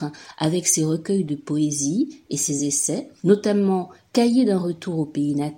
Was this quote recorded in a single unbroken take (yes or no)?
yes